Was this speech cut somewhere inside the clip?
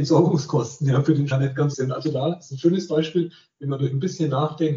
yes; 2 cuts; at 1.3 s, 1.7 s

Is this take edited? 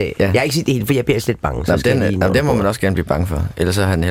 no; 0 cuts

